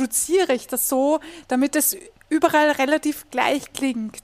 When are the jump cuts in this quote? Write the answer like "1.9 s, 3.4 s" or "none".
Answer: none